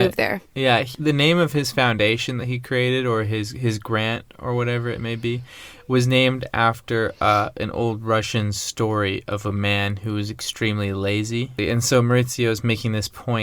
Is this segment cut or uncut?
uncut